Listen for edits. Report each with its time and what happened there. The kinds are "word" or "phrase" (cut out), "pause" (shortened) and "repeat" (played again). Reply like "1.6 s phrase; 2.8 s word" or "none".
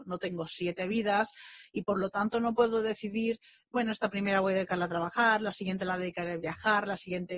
none